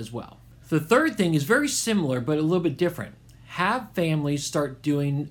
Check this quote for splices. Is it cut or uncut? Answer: uncut